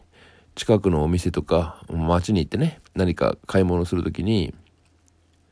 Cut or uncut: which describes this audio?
cut